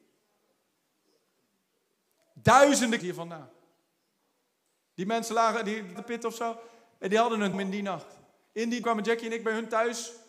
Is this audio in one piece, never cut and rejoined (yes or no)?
no